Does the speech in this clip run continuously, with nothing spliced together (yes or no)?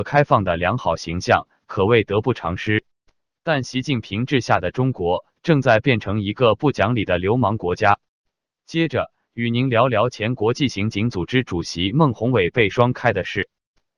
yes